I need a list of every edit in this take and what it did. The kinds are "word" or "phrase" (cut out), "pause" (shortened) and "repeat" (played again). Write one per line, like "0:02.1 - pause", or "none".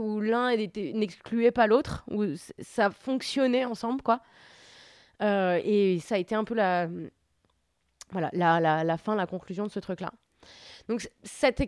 none

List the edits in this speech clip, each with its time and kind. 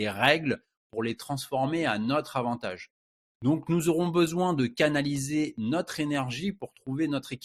none

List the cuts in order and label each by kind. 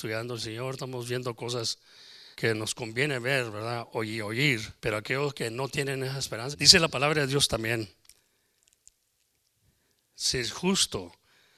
0:02.3 - pause
0:04.8 - pause
0:06.5 - word

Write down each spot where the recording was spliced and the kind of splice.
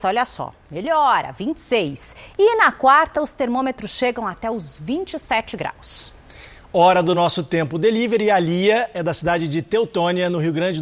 none

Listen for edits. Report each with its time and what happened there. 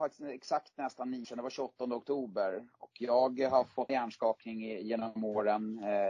0:01.2 - word
0:03.9 - word

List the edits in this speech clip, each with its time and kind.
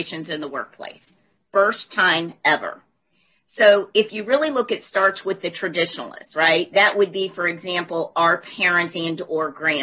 none

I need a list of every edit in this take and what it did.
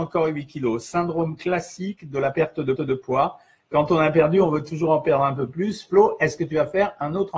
0:02.7 - repeat

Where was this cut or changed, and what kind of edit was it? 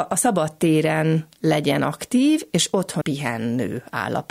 0:03.0 - phrase

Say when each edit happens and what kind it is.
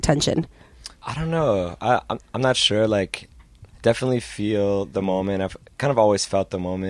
0:00.9 - pause
0:03.7 - pause

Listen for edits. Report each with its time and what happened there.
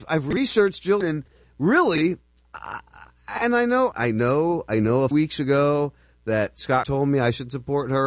0:01.0 - word
0:03.9 - word
0:05.1 - word
0:06.8 - word

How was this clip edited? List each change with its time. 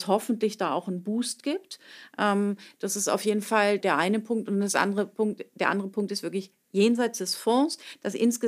0:03.8 - word

